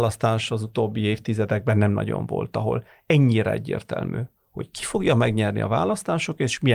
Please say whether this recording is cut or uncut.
uncut